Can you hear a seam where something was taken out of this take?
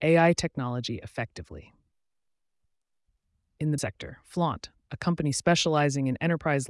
yes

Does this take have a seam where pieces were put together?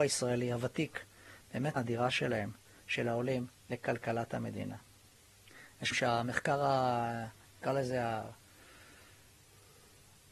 yes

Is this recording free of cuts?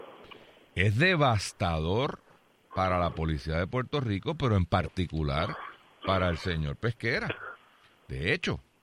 yes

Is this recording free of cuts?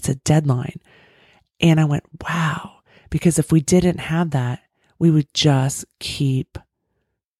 yes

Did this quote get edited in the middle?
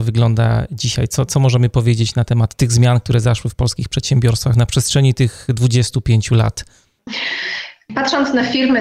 no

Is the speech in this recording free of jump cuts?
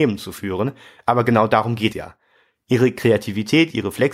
no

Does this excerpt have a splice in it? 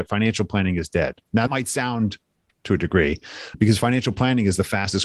yes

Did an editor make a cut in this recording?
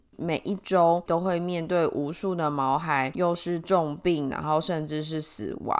no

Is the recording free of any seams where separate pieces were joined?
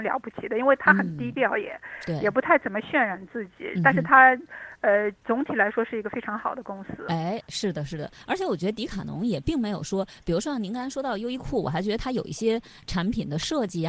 yes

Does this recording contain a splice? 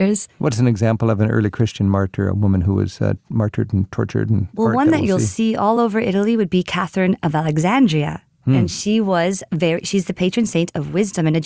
no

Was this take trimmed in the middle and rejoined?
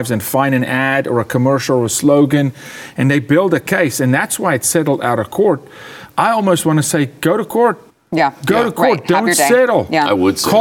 yes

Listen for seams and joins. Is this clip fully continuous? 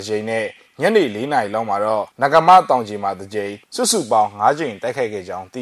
no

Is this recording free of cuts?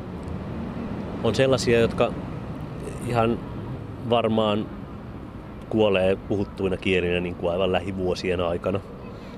yes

